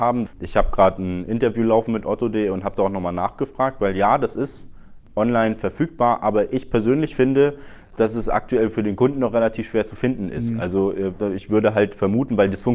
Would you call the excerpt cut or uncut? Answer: uncut